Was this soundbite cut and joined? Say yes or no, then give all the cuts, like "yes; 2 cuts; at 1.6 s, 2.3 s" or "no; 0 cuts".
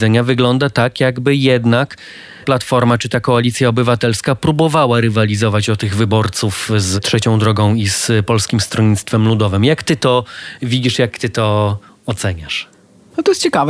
yes; 1 cut; at 2.4 s